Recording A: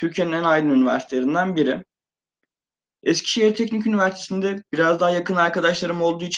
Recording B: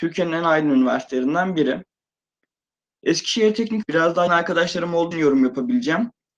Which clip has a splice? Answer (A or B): B